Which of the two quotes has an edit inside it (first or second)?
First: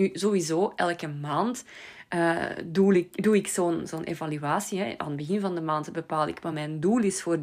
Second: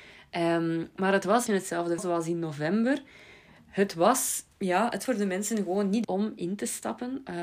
second